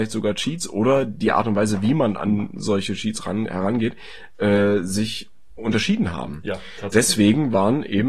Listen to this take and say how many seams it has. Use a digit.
0